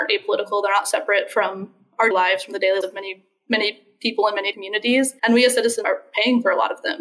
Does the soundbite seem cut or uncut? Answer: cut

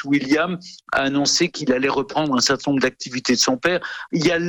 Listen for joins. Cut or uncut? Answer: uncut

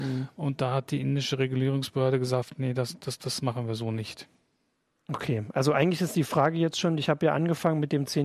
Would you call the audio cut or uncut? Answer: uncut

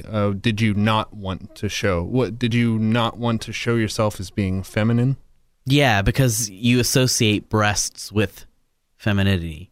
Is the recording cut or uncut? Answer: uncut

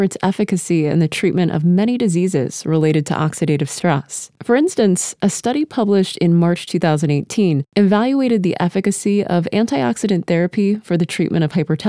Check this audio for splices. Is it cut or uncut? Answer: uncut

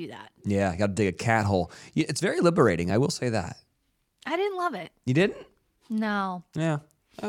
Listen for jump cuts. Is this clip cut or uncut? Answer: uncut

